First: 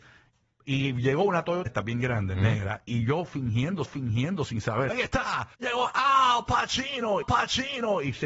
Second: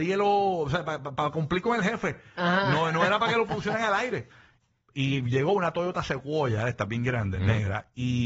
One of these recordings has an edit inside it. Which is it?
first; 6 cuts; at 1.7 s, 2.9 s, 3.9 s, 4.9 s, 5.5 s, 7.2 s

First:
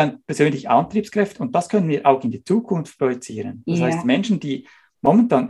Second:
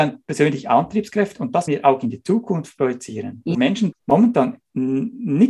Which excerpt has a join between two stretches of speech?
second; 3 cuts; at 1.7 s, 3.5 s, 3.9 s

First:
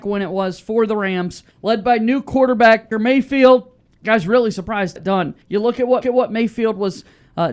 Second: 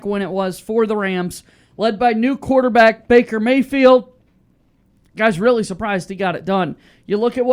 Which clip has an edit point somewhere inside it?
first; 6 cuts; at 1.5 s, 2.9 s, 3.9 s, 5.0 s, 5.4 s, 6.0 s

